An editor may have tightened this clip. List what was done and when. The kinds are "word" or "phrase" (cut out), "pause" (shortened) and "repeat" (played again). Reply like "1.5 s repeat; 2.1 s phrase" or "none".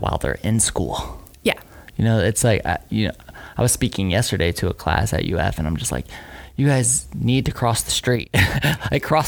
none